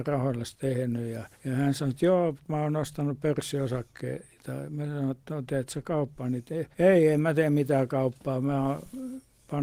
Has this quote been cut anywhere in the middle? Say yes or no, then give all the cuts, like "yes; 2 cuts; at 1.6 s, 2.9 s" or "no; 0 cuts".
yes; 2 cuts; at 1.3 s, 6.7 s